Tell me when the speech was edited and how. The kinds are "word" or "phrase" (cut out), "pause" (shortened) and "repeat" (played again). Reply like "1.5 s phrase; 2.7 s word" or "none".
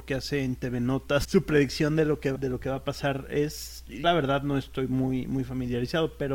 1.2 s word; 2.3 s word; 4.0 s word